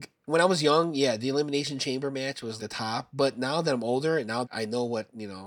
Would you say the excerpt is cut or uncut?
cut